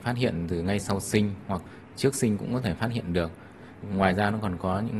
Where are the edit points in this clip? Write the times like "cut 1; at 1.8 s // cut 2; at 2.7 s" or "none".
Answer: none